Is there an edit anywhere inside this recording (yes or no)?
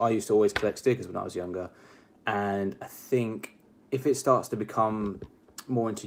no